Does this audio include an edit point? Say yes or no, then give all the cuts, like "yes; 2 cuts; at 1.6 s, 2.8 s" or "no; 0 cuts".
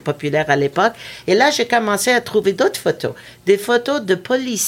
no; 0 cuts